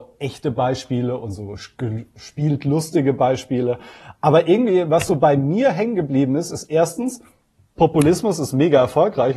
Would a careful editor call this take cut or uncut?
uncut